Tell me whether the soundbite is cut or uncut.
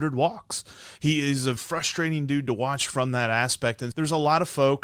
cut